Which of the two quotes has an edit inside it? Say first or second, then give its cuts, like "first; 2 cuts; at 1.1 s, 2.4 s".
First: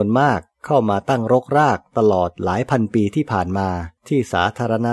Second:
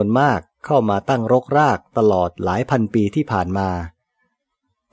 first; 1 cut; at 4.0 s